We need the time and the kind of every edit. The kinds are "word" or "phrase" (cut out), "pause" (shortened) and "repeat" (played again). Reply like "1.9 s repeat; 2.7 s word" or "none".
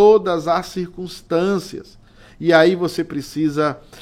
none